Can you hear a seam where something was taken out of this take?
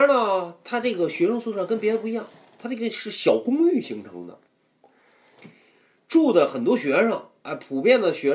no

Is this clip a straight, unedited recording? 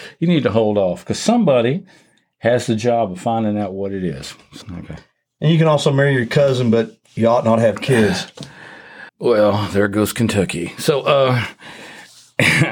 no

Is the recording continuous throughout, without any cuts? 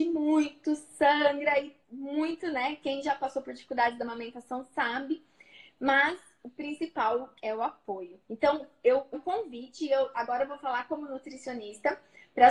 no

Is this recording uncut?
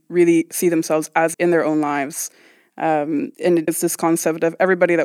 no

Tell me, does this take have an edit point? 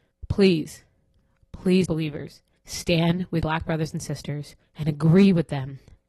yes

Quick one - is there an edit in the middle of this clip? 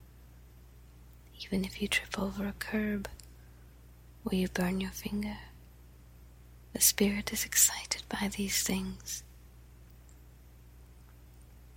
no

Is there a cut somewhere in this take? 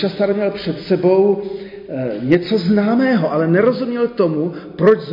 no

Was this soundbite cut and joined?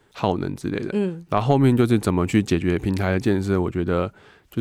no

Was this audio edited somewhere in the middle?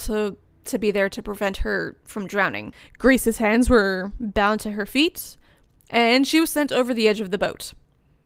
no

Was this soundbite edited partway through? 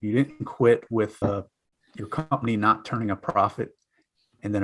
yes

